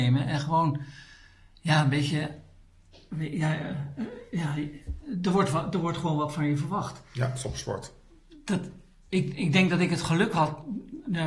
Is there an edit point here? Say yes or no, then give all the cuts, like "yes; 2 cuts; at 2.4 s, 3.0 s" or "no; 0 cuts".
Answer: no; 0 cuts